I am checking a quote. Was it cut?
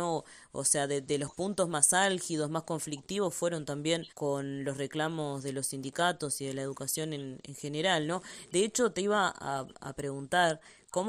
yes; 1 cut; at 4.1 s

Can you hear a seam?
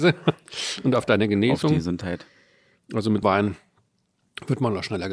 yes; 1 cut; at 3.2 s

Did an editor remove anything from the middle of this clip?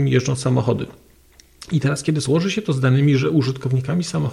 no; 0 cuts

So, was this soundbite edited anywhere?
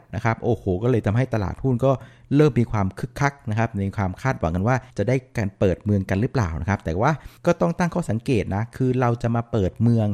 yes; 2 cuts; at 4.9 s, 7.4 s

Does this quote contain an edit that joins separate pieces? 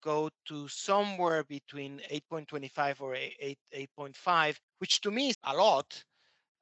yes; 2 cuts; at 4.7 s, 5.3 s

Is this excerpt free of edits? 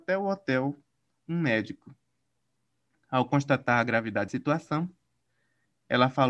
no; 1 cut; at 4.3 s

